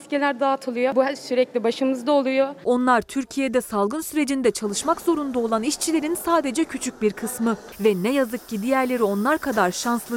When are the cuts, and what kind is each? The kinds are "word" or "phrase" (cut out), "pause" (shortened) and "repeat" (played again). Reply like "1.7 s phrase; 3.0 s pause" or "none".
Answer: none